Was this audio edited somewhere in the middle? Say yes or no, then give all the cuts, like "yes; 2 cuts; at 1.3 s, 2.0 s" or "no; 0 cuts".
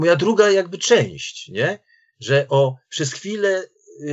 no; 0 cuts